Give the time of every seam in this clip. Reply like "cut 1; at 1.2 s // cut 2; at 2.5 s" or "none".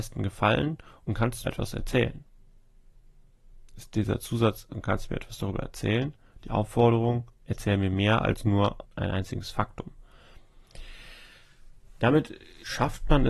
cut 1; at 1.4 s // cut 2; at 7.3 s // cut 3; at 8.8 s